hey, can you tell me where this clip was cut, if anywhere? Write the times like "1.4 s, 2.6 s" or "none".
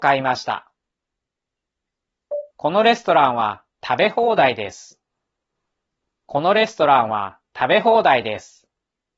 2.5 s, 5.5 s